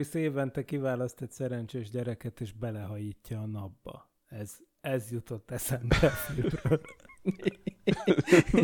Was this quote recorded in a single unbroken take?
yes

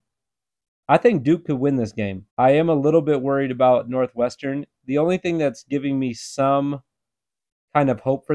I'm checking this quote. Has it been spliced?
yes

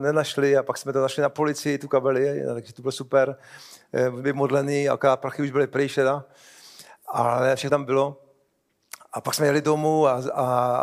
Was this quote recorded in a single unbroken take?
no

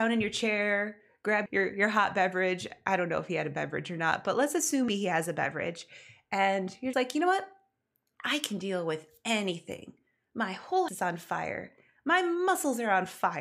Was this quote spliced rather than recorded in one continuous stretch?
yes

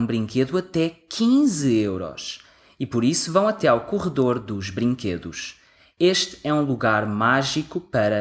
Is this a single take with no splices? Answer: yes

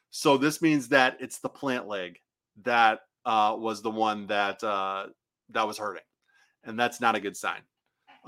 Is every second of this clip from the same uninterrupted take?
yes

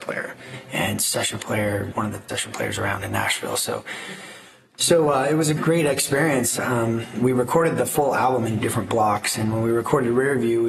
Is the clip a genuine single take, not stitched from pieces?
no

